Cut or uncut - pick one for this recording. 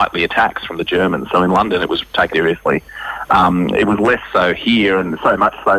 cut